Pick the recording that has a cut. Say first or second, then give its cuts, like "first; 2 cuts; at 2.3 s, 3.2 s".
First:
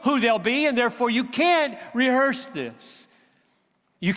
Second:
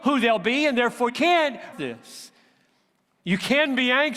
second; 2 cuts; at 1.1 s, 1.7 s